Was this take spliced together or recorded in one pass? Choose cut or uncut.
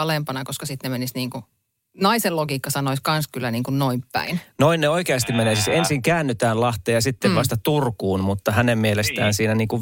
uncut